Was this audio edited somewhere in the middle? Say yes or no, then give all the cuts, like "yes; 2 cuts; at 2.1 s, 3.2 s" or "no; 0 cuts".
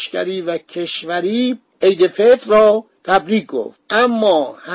no; 0 cuts